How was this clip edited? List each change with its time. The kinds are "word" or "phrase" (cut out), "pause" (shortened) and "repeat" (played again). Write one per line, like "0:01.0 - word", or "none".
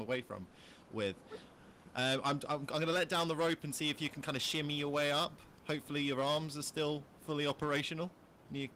none